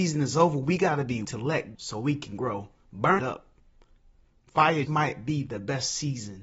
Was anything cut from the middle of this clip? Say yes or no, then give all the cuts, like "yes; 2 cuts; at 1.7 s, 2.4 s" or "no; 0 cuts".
yes; 4 cuts; at 1.2 s, 1.7 s, 3.2 s, 4.8 s